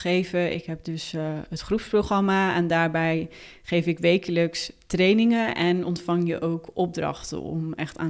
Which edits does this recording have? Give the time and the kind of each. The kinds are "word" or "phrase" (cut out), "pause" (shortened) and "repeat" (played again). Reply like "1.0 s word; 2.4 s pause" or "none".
none